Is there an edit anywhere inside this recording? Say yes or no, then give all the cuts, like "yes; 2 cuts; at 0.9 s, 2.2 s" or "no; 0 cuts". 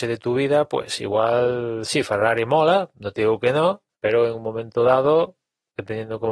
yes; 1 cut; at 3.9 s